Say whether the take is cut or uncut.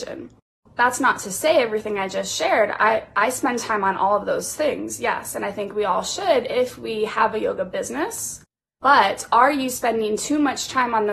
uncut